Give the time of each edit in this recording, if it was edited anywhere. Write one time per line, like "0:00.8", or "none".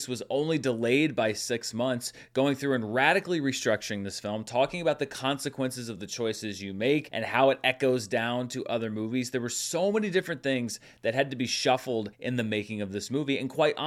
0:12.1